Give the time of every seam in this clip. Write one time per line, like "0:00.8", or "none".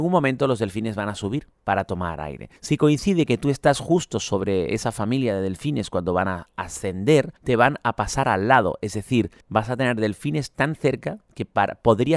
0:02.6
0:07.4
0:09.4